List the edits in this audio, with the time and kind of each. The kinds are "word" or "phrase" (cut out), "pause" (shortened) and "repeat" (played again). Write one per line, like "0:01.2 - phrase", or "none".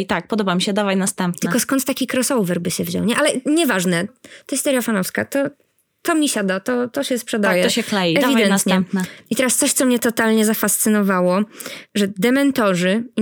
0:04.1 - word